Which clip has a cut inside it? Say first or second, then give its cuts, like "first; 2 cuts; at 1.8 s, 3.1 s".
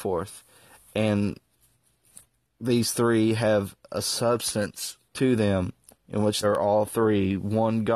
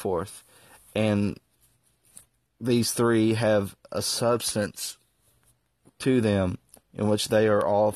first; 2 cuts; at 5.1 s, 6.4 s